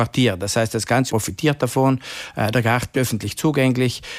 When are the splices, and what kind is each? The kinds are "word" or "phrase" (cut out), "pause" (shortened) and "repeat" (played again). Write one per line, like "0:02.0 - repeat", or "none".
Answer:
0:01.1 - word
0:02.9 - word